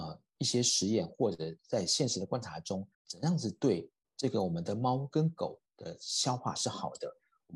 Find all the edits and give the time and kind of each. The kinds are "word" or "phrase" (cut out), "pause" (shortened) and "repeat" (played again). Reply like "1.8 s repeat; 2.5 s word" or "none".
2.9 s pause